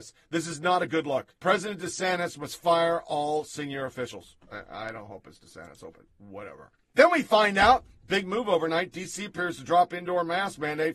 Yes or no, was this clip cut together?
yes